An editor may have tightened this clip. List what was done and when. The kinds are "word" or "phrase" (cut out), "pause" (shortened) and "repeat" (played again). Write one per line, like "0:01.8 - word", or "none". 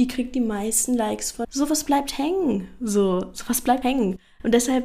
0:01.4 - phrase
0:03.8 - word